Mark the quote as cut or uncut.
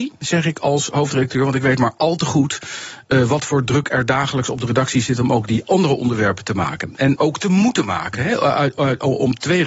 uncut